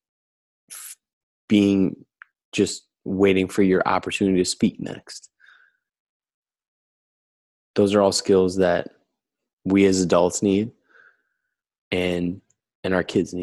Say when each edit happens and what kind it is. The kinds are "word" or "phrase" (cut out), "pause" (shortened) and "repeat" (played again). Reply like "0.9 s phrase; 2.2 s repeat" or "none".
none